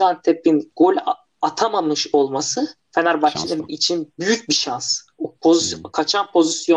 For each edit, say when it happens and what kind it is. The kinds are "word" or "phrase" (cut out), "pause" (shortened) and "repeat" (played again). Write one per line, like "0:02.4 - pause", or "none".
0:02.8 - pause